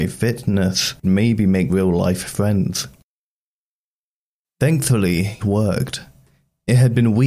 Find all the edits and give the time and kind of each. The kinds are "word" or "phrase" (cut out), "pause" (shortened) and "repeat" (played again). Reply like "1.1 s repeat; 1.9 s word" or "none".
1.0 s phrase; 1.7 s word; 5.4 s word